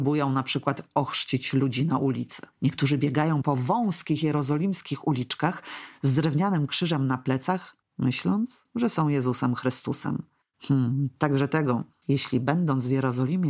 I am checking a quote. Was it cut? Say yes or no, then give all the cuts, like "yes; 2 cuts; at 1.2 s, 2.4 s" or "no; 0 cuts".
yes; 2 cuts; at 2.5 s, 10.4 s